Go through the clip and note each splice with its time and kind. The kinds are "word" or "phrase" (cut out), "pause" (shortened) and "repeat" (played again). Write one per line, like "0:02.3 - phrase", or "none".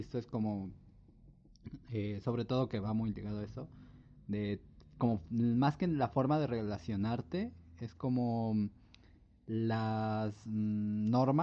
none

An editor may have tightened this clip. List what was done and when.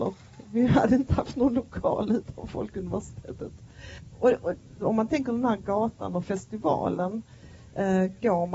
0:04.7 - word

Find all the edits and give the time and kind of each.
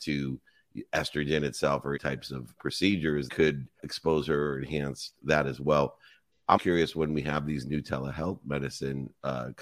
0:02.0 - word
0:02.6 - word
0:03.3 - word
0:03.8 - word
0:05.2 - word
0:06.6 - word

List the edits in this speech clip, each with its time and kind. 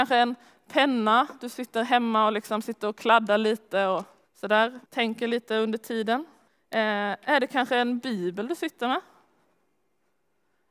0:04.2 - word
0:04.9 - pause
0:06.5 - pause

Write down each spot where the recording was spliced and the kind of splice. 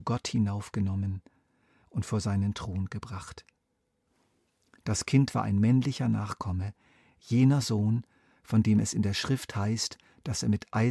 none

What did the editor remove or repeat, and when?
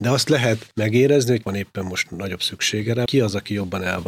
0:01.4 - word
0:03.1 - word

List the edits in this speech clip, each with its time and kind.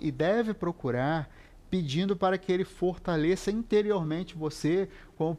none

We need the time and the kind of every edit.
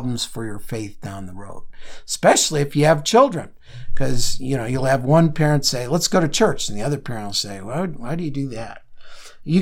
none

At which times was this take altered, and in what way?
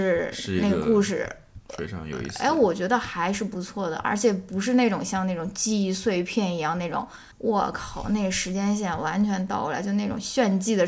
0:07.3 - pause

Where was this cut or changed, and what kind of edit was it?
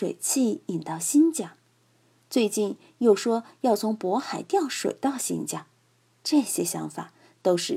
none

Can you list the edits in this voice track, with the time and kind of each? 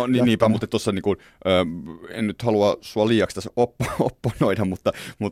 none

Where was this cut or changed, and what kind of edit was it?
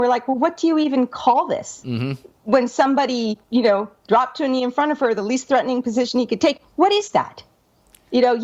0:03.4 - pause

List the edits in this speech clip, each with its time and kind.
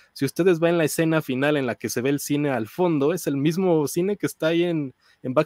none

